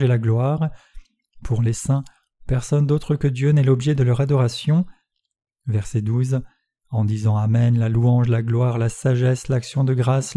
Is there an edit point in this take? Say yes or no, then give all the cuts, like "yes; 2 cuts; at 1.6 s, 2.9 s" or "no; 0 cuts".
no; 0 cuts